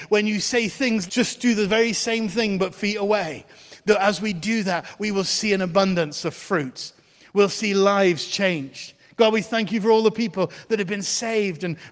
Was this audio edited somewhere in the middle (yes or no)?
yes